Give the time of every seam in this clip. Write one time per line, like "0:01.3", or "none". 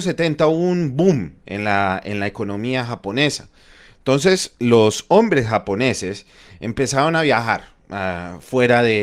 none